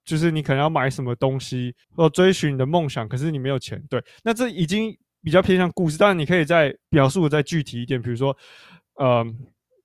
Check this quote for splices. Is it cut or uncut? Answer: cut